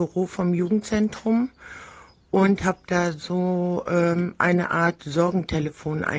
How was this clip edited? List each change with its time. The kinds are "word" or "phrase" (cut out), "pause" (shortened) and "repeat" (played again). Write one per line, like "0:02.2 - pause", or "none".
none